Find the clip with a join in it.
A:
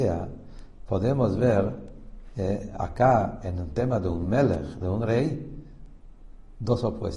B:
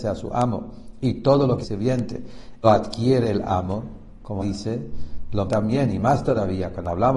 B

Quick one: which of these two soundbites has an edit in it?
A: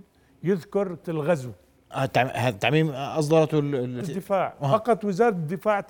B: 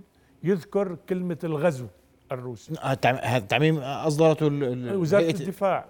A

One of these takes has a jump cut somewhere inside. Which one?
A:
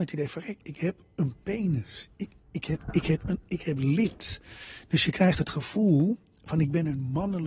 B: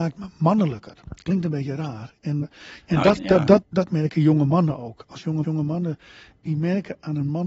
B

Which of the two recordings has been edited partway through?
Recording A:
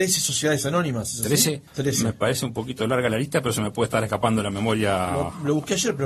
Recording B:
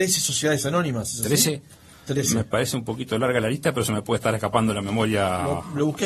A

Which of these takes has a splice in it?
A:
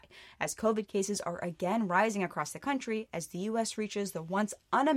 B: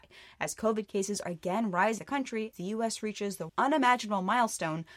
B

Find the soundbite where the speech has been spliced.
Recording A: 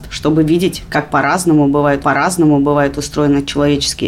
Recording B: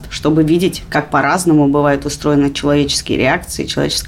A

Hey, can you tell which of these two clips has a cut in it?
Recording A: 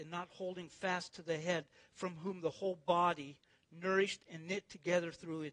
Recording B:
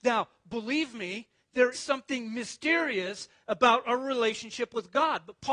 B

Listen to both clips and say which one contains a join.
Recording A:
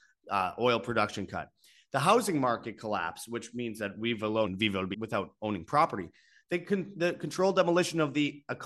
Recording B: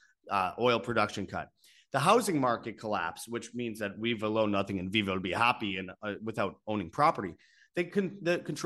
A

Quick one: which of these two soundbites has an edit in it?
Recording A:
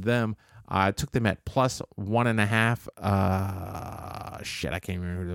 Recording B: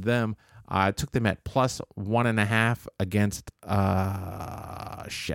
A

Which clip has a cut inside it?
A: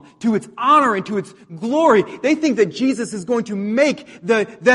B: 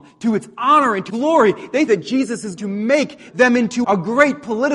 B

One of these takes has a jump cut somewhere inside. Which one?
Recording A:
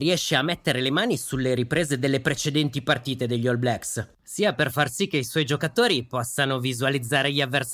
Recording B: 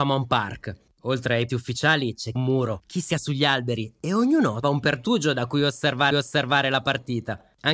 B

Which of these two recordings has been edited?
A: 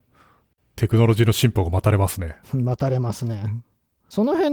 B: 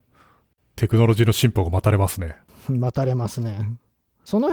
A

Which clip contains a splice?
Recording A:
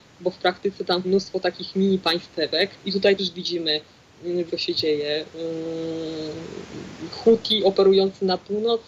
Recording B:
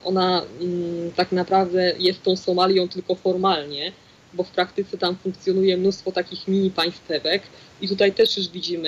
A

